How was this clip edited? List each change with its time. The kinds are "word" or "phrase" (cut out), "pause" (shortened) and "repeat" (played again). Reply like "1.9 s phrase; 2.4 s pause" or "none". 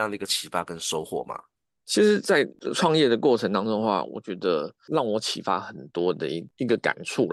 none